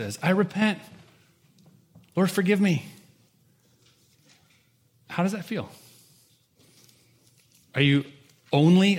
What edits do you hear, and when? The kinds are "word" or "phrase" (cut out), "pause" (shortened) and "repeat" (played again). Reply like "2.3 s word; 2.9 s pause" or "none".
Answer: none